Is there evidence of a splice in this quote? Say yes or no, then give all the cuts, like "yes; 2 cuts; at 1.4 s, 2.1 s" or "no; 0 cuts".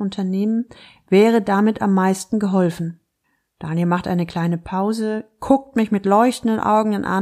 no; 0 cuts